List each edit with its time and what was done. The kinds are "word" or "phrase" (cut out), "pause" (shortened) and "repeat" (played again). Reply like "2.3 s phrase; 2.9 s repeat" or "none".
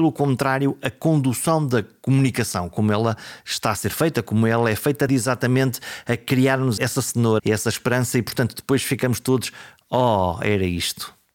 5.1 s word; 6.8 s word; 7.4 s word